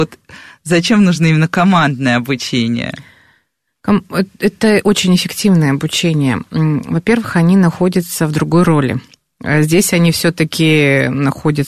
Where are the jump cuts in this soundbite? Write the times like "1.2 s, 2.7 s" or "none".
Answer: none